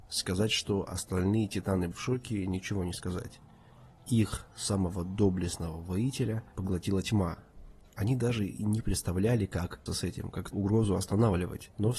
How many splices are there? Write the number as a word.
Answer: three